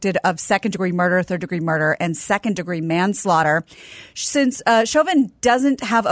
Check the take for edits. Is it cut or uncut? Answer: uncut